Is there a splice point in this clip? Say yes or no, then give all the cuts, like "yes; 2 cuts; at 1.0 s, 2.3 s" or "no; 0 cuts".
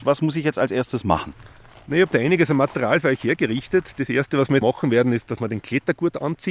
yes; 1 cut; at 4.6 s